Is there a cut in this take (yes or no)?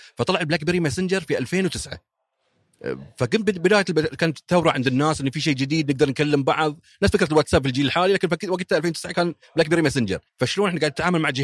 yes